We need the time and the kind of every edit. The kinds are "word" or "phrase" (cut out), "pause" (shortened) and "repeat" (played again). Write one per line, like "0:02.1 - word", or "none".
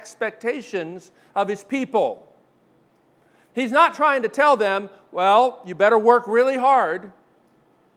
none